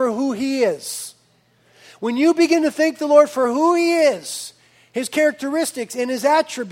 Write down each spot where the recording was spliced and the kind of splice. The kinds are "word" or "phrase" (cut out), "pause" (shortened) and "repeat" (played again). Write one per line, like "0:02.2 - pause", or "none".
none